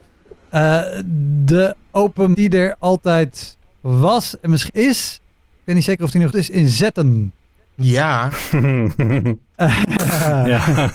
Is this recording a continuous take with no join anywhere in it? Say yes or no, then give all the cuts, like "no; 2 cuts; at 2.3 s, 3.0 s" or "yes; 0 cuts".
no; 3 cuts; at 2.3 s, 4.7 s, 6.3 s